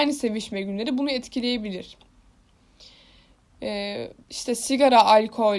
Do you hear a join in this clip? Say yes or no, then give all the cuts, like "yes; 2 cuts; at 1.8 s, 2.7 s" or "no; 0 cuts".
yes; 1 cut; at 4.2 s